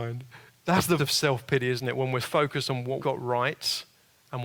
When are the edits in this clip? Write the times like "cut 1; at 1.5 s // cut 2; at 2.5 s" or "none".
cut 1; at 1.0 s // cut 2; at 2.2 s // cut 3; at 3.0 s